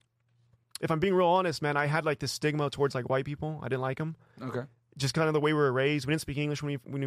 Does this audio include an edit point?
no; 0 cuts

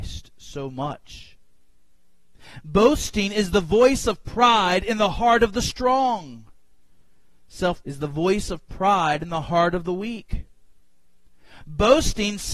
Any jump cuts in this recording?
yes; 1 cut; at 7.8 s

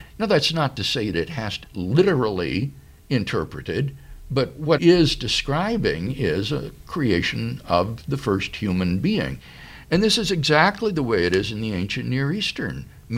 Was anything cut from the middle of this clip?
yes; 3 cuts; at 1.1 s, 1.6 s, 4.8 s

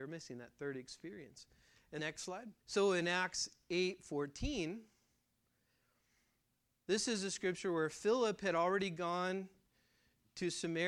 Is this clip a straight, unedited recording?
no; 2 cuts; at 2.0 s, 2.6 s

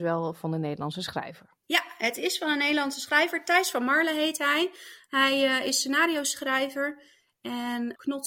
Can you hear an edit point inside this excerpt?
yes; 1 cut; at 1.6 s

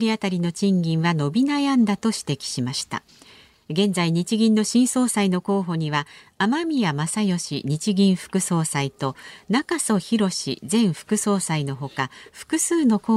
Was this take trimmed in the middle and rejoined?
no; 0 cuts

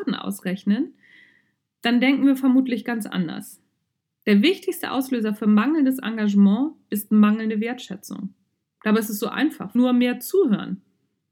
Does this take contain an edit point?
yes; 1 cut; at 9.8 s

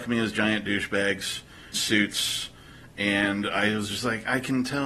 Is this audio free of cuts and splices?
no; 1 cut; at 1.7 s

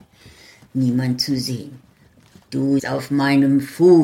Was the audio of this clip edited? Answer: yes; 1 cut; at 2.8 s

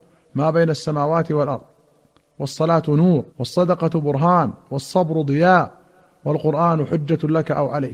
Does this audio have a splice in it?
yes; 1 cut; at 3.3 s

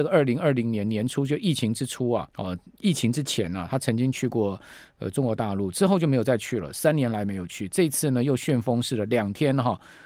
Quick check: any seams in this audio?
yes; 1 cut; at 2.3 s

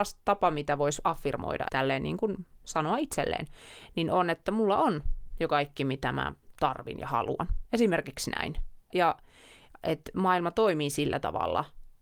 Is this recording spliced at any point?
yes; 2 cuts; at 1.7 s, 8.9 s

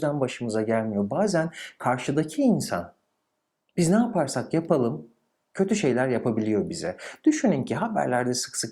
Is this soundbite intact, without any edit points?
yes; 0 cuts

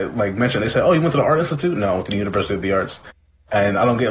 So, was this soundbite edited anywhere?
no; 0 cuts

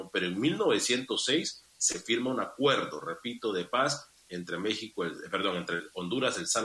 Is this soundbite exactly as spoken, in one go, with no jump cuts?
yes; 0 cuts

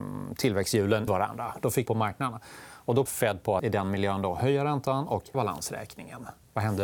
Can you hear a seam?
yes; 5 cuts; at 1.1 s, 1.9 s, 3.1 s, 3.6 s, 5.3 s

